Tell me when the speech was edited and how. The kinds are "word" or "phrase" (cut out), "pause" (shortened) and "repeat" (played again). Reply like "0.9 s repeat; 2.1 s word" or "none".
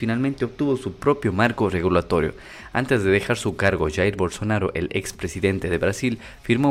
none